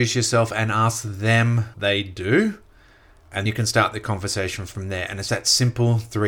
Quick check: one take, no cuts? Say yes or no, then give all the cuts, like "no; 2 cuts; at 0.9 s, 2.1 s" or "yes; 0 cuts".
no; 3 cuts; at 1.7 s, 3.5 s, 5.3 s